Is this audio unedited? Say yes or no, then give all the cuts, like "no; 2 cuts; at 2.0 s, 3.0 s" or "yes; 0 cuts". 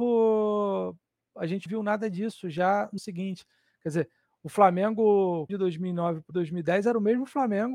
no; 4 cuts; at 1.7 s, 3.0 s, 5.5 s, 6.3 s